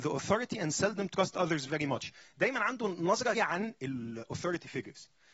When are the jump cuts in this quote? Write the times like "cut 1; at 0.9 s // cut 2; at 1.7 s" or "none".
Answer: cut 1; at 3.3 s